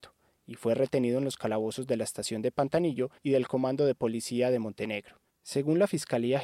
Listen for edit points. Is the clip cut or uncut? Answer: cut